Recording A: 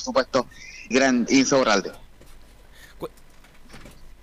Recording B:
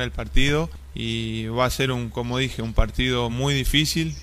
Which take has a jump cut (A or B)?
A